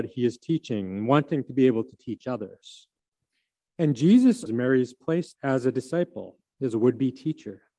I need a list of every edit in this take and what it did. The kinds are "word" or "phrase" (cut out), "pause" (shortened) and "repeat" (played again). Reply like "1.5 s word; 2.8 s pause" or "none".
3.1 s pause; 4.5 s word; 5.3 s word